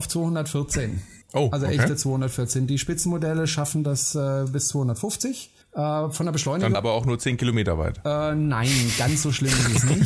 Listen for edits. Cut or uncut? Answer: cut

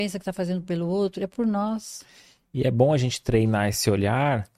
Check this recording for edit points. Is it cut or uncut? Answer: uncut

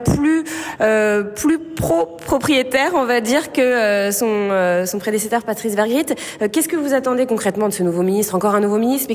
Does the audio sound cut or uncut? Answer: uncut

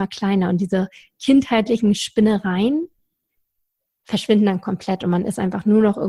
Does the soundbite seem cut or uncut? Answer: uncut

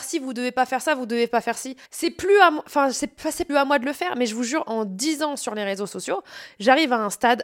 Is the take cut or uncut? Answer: cut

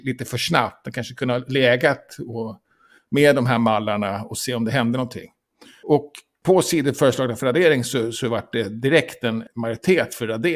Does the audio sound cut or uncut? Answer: uncut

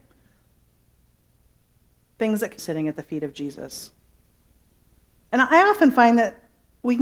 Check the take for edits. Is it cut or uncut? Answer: cut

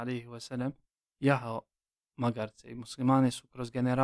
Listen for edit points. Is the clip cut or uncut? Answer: uncut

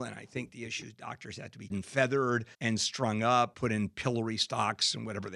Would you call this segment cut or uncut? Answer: cut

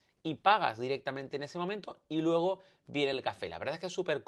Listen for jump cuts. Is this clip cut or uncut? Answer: uncut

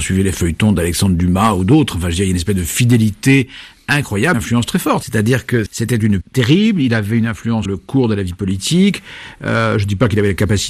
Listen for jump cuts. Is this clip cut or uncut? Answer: cut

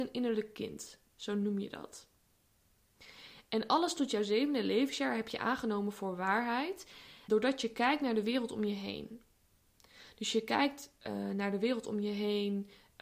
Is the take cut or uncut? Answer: cut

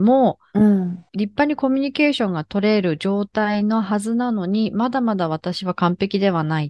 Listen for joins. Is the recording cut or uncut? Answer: cut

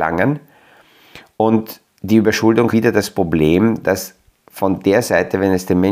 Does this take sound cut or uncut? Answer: cut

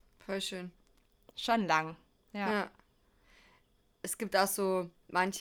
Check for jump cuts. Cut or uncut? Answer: uncut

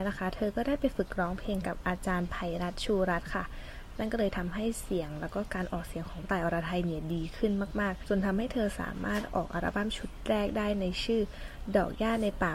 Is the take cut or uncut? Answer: cut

